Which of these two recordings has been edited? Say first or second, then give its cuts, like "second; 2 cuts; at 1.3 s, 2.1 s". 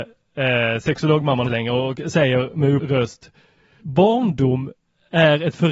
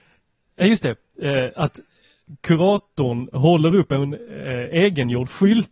first; 3 cuts; at 1.4 s, 2.8 s, 3.8 s